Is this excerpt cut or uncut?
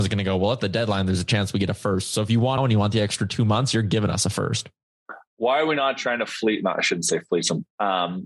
cut